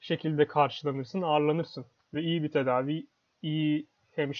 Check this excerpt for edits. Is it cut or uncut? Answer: uncut